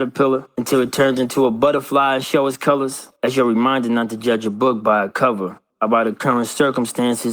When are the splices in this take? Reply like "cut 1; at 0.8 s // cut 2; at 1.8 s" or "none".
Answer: none